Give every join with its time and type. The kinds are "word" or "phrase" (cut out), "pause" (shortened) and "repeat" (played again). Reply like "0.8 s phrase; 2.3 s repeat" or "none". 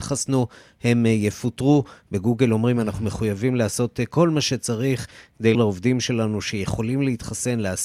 5.5 s word